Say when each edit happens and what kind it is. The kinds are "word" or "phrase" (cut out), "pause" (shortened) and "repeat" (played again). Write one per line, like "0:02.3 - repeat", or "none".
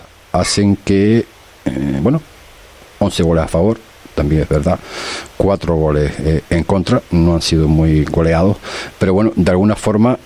none